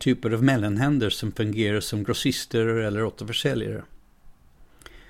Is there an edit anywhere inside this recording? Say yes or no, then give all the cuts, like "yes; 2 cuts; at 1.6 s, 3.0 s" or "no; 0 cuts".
no; 0 cuts